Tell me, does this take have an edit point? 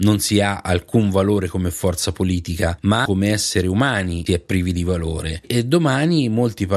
yes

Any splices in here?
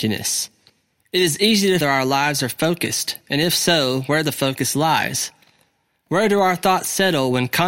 yes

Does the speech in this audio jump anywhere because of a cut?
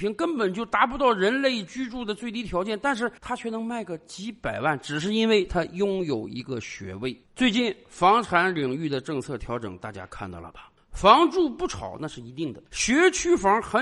yes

